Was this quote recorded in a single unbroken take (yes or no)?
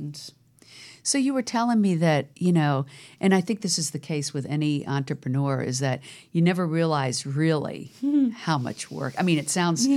yes